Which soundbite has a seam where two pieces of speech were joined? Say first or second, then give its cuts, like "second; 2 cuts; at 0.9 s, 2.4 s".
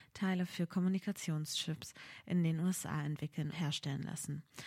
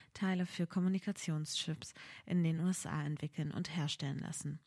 first; 1 cut; at 3.5 s